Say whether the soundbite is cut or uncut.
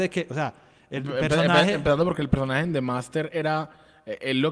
uncut